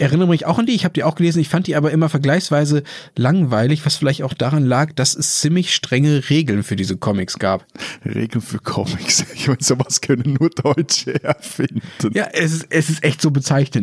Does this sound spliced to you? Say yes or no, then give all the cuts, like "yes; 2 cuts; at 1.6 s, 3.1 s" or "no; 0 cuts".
no; 0 cuts